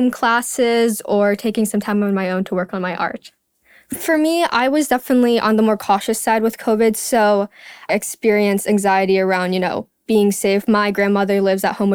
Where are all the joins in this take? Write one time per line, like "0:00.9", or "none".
0:07.9